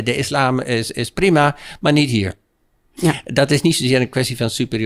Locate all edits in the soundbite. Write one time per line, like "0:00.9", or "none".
none